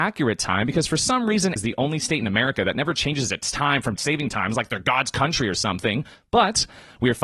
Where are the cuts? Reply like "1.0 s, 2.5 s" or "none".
1.6 s, 4.0 s